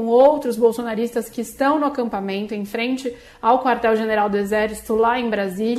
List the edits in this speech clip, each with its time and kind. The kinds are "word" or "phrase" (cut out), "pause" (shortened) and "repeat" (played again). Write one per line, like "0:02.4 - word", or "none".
none

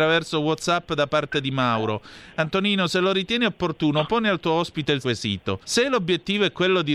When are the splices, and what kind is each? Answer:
0:05.0 - word
0:05.6 - pause

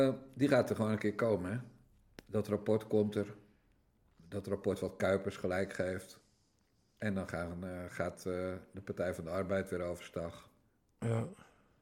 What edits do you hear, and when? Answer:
none

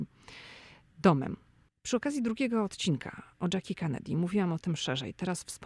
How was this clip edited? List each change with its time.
none

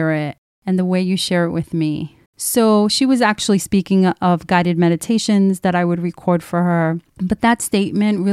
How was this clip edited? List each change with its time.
0:02.3 - pause
0:07.1 - pause

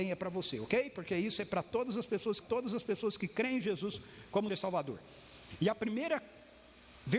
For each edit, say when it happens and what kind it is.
0:02.4 - repeat
0:04.5 - word

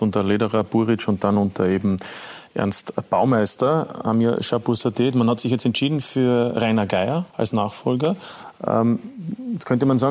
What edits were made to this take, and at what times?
0:07.3 - pause

